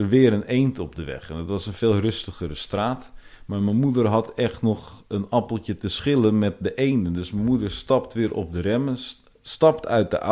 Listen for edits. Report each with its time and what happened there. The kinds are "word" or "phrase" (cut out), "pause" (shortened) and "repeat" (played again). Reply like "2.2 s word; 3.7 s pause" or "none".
none